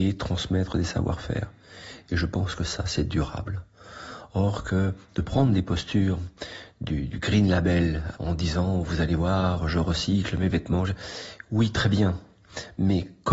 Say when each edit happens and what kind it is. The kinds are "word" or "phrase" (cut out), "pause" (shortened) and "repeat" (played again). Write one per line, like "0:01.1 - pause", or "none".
0:07.1 - word
0:08.1 - word

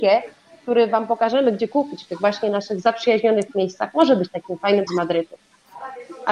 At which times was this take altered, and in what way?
0:04.9 - word

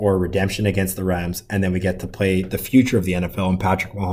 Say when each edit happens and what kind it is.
none

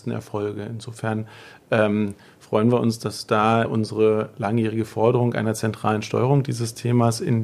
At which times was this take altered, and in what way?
0:03.7 - word

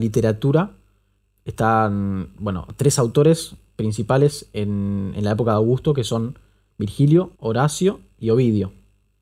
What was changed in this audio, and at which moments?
0:07.4 - pause

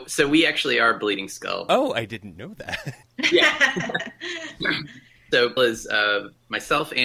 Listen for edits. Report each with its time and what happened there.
0:03.0 - pause
0:05.6 - phrase

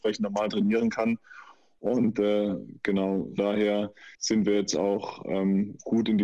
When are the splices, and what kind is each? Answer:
0:03.4 - word
0:04.1 - pause

